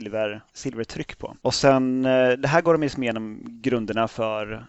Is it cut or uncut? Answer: uncut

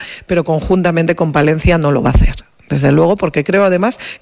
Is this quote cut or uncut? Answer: uncut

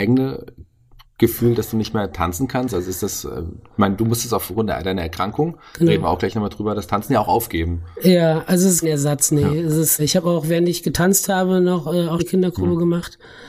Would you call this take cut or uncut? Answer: cut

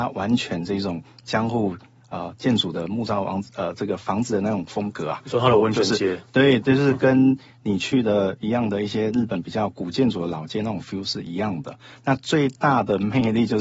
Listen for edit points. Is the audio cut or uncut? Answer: uncut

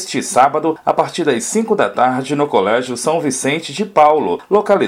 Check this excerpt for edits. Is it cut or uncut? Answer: uncut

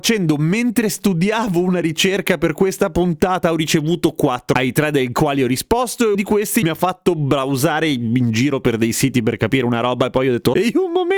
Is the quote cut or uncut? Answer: cut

